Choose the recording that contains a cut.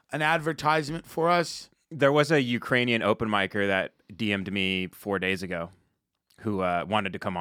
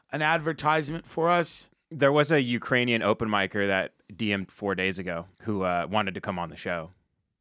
second; 2 cuts; at 4.4 s, 5.3 s

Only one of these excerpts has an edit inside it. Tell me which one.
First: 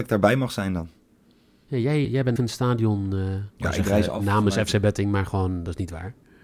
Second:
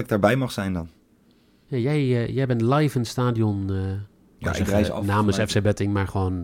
first; 3 cuts; at 2.0 s, 2.4 s, 3.5 s

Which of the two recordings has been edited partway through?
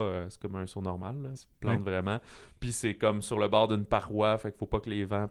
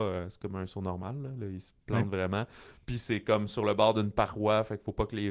first; 1 cut; at 1.4 s

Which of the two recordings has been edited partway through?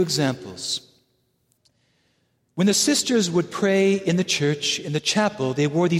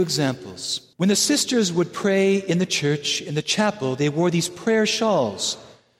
second; 1 cut; at 0.9 s

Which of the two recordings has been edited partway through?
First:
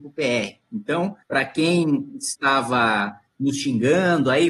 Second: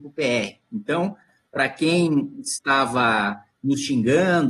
first; 1 cut; at 1.2 s

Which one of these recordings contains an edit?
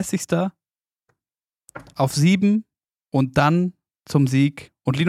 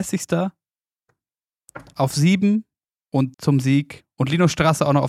second; 1 cut; at 3.3 s

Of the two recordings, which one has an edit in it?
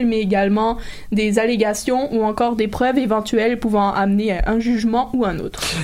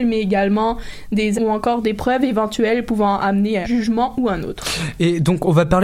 second; 2 cuts; at 1.3 s, 3.6 s

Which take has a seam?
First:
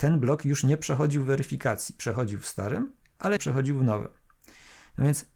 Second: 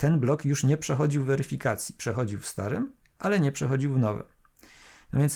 first; 1 cut; at 3.4 s

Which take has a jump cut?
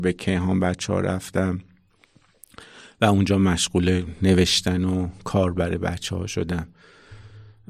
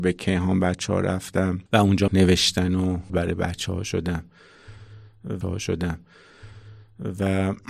second; 4 cuts; at 1.7 s, 2.1 s, 3.1 s, 5.4 s

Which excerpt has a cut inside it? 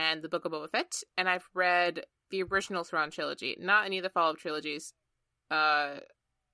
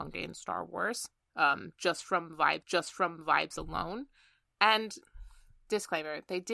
second; 1 cut; at 2.6 s

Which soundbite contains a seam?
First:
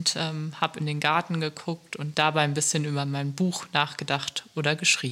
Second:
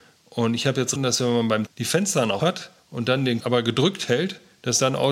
second; 5 cuts; at 1.0 s, 1.7 s, 2.4 s, 2.8 s, 3.4 s

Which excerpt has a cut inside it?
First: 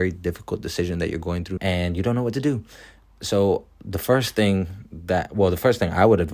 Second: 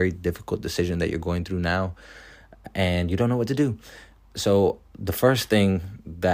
first; 1 cut; at 1.6 s

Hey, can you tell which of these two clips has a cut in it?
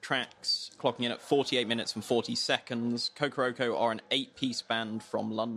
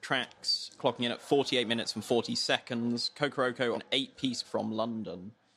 second; 2 cuts; at 3.7 s, 4.4 s

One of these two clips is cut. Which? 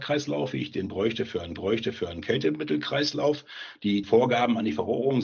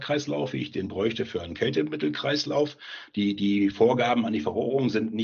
first; 2 cuts; at 1.6 s, 4.0 s

